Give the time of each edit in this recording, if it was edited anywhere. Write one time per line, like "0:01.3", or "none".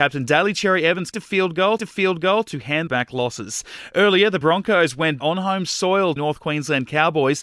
0:01.1
0:01.8
0:02.9
0:04.4
0:05.2
0:06.2